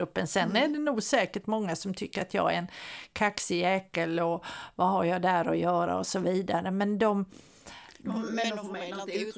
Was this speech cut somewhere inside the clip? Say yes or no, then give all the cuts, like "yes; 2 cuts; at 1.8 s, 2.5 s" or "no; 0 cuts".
no; 0 cuts